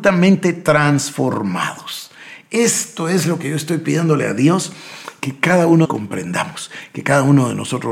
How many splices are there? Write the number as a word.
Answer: one